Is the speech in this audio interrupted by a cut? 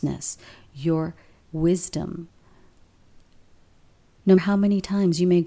yes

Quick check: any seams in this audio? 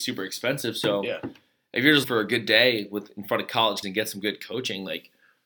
yes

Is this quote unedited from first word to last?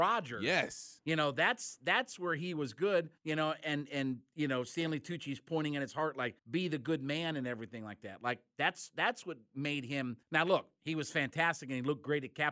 no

